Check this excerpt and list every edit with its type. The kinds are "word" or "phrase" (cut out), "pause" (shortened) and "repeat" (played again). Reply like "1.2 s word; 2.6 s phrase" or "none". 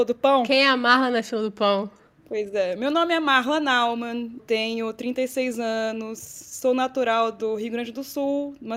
4.4 s word